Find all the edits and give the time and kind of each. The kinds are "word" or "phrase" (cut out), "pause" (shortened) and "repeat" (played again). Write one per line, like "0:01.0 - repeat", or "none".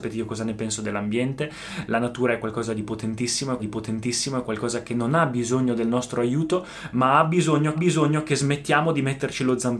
0:03.6 - repeat
0:07.7 - repeat

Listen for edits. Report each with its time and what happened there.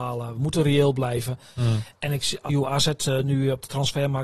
0:02.5 - phrase

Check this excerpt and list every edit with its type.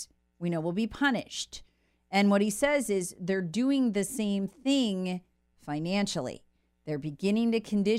none

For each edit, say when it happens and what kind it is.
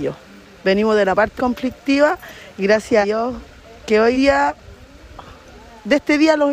0:01.4 - word
0:03.0 - word
0:04.1 - word

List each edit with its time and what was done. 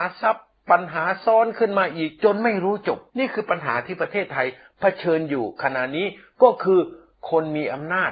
0:03.1 - pause

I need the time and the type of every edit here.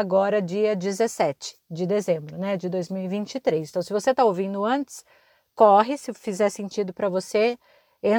none

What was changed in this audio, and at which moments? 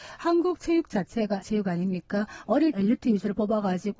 0:01.4 - word
0:02.7 - word

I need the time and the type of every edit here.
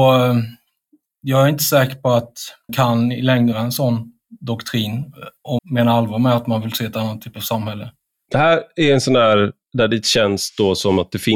0:02.7 - word
0:03.5 - word
0:05.6 - word

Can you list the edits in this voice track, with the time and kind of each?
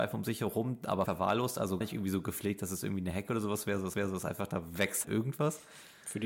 0:01.1 - word
0:01.8 - word
0:03.9 - repeat
0:05.0 - word

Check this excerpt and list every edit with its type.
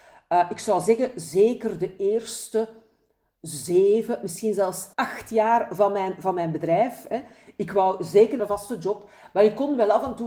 0:04.9 - pause
0:08.4 - phrase

